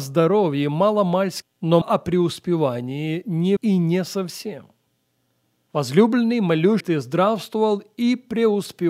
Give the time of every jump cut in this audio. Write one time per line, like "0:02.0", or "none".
0:01.4
0:01.8
0:03.6
0:06.8